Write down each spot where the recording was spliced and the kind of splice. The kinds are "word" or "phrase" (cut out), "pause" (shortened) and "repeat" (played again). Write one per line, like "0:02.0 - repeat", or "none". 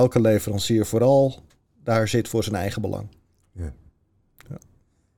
none